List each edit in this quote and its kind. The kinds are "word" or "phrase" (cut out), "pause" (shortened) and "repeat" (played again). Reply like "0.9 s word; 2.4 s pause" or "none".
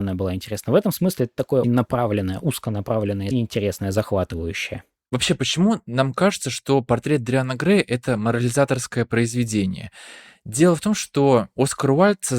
1.6 s word; 3.3 s phrase